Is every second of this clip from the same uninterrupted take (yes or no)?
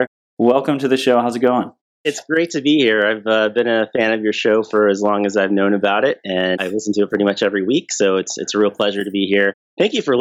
yes